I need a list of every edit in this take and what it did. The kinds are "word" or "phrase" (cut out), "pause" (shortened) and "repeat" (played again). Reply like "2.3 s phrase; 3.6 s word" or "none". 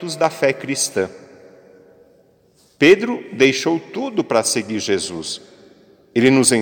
none